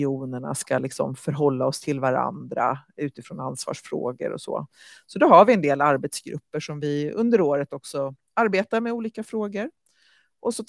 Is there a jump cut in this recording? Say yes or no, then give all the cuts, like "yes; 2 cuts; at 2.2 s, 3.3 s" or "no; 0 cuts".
no; 0 cuts